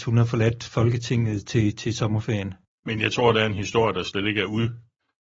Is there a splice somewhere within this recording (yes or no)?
no